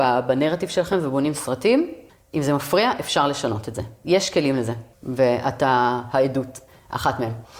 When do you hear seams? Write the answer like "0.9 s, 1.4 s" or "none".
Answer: 4.9 s

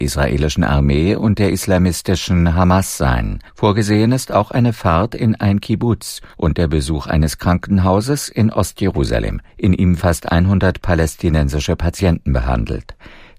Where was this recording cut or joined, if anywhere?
3.5 s, 6.3 s, 9.5 s, 10.0 s

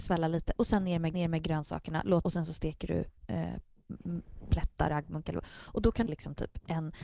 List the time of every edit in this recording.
1.1 s, 2.2 s, 3.2 s, 4.9 s, 6.1 s

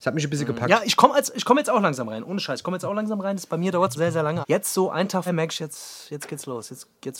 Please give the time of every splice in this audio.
3.9 s, 4.4 s, 5.3 s, 5.6 s

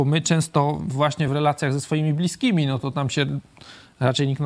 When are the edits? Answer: none

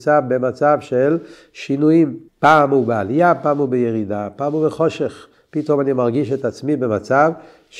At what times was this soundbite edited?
2.3 s

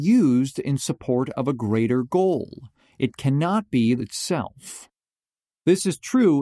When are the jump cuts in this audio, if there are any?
4.0 s

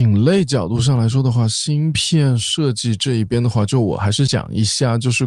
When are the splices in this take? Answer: none

